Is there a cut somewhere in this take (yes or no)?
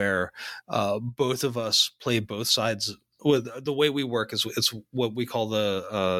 no